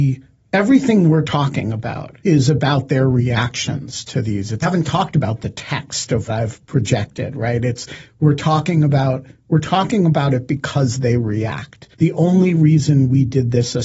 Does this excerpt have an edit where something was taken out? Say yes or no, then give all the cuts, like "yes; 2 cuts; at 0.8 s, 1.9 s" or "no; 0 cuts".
yes; 4 cuts; at 2.2 s, 4.6 s, 6.3 s, 11.9 s